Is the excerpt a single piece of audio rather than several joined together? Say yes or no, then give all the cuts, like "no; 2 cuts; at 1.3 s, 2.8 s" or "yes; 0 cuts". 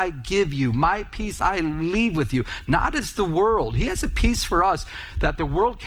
yes; 0 cuts